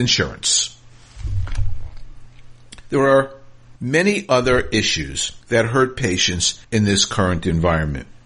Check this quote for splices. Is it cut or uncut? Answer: cut